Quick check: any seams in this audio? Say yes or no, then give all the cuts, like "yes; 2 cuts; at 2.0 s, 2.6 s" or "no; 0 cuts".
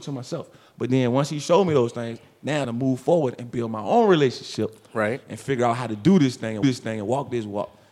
yes; 2 cuts; at 2.6 s, 6.6 s